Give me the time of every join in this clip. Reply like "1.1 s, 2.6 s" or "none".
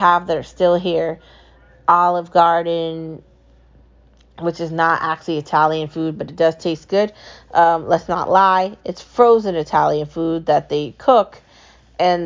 none

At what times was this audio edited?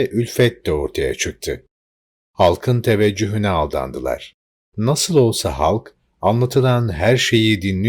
none

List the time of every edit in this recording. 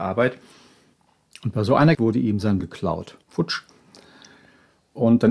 1.9 s, 2.6 s, 3.2 s

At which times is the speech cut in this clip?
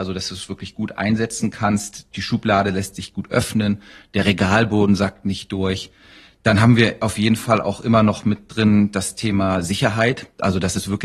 none

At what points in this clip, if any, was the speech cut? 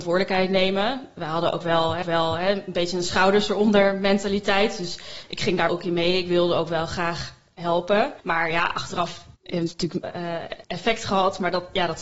2.0 s, 5.7 s, 8.2 s, 9.3 s, 10.0 s, 10.6 s

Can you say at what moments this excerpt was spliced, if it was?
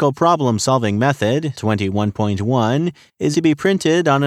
1.6 s, 3.3 s

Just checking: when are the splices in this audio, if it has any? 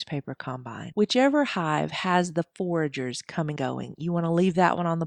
3.6 s

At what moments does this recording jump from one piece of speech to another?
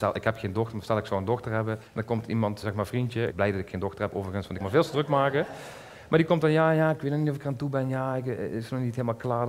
1.9 s, 2.6 s, 3.3 s, 4.6 s

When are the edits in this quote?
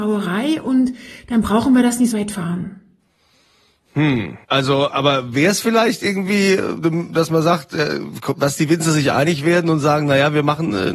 2.1 s, 4.4 s

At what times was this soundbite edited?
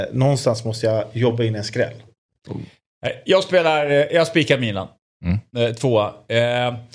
none

